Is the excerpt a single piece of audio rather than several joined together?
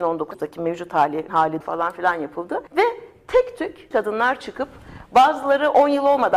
no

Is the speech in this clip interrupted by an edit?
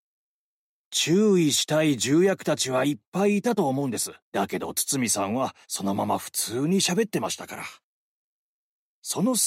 yes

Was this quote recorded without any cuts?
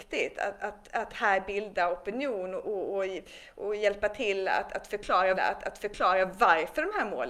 no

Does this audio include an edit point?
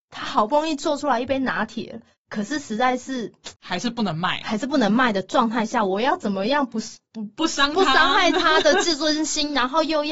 yes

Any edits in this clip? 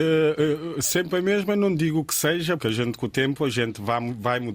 yes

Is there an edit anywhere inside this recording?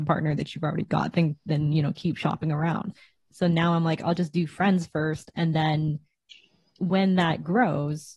no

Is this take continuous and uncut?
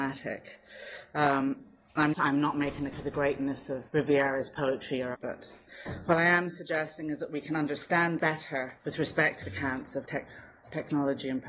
no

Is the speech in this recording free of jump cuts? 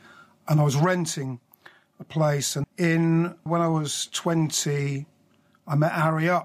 no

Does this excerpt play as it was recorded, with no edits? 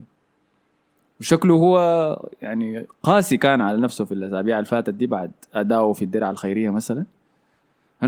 yes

